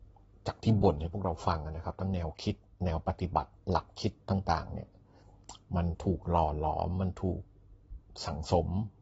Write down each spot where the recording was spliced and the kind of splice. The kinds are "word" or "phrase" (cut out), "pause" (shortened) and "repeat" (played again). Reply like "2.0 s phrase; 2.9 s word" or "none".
2.7 s pause; 3.6 s pause